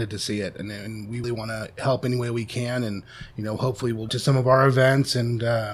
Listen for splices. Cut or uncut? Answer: cut